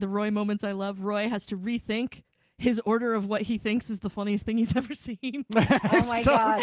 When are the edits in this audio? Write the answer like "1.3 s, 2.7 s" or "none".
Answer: none